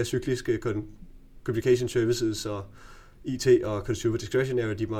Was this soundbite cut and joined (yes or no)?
no